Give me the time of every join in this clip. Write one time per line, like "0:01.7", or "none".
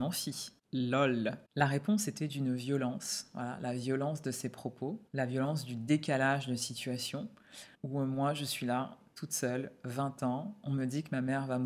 0:05.1
0:07.7